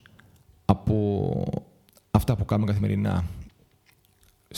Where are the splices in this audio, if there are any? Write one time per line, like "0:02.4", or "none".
none